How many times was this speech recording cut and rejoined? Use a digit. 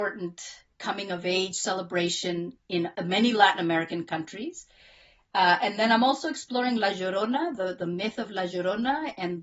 1